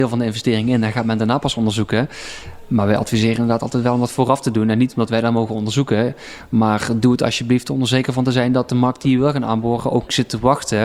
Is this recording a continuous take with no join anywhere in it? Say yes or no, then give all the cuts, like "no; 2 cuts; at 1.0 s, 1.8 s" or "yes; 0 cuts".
yes; 0 cuts